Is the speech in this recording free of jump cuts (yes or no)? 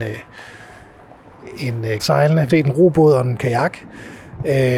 no